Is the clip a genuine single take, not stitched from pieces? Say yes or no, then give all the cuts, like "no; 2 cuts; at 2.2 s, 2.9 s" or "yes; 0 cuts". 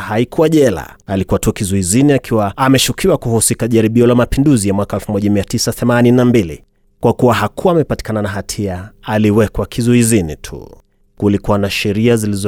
no; 1 cut; at 1.0 s